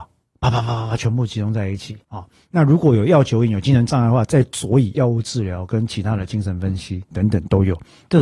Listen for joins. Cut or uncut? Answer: cut